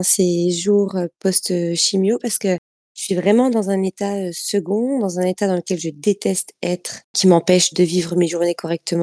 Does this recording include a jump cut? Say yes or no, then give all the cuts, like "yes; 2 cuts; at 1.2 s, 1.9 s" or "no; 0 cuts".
yes; 1 cut; at 7.7 s